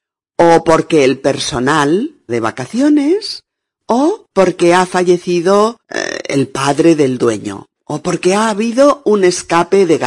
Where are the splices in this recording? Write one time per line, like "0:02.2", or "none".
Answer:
0:02.3
0:04.3
0:05.8